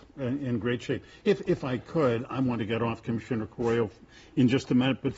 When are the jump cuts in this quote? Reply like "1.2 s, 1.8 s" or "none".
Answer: none